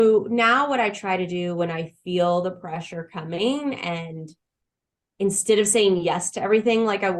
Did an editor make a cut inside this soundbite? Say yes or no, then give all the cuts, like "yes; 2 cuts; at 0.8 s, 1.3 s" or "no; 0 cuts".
no; 0 cuts